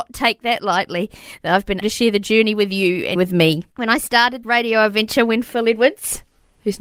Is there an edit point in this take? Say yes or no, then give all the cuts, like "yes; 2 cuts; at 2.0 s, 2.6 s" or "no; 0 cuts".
yes; 4 cuts; at 1.8 s, 3.1 s, 3.7 s, 4.4 s